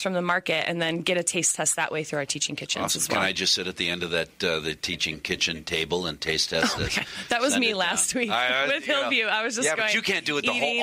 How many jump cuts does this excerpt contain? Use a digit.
0